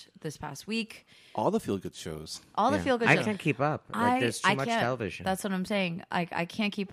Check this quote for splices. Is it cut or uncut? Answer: uncut